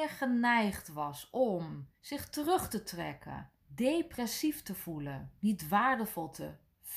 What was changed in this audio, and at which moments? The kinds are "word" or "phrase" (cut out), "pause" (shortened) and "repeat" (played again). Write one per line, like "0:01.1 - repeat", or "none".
0:02.0 - pause
0:03.6 - pause
0:05.4 - pause